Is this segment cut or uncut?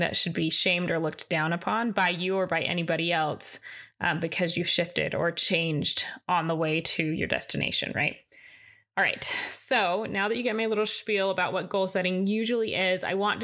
uncut